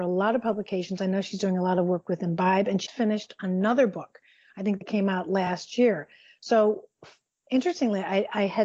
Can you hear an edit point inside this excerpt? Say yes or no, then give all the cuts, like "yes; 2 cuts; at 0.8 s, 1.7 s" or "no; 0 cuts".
yes; 1 cut; at 2.9 s